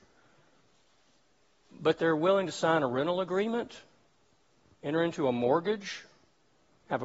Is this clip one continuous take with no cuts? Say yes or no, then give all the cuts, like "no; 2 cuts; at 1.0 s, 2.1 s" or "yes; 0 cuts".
yes; 0 cuts